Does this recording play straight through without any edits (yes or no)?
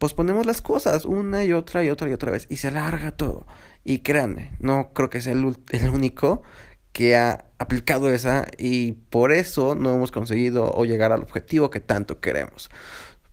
yes